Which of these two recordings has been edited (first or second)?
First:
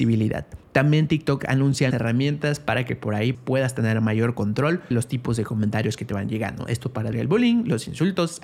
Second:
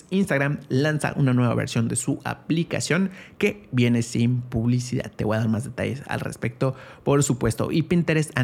first